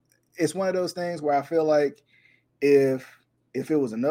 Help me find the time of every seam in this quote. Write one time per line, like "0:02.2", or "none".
none